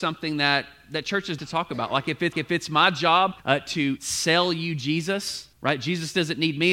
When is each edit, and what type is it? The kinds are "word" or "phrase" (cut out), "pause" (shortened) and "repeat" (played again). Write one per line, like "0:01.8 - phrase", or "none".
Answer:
0:01.4 - phrase
0:02.3 - repeat
0:03.4 - pause
0:04.0 - word
0:05.5 - pause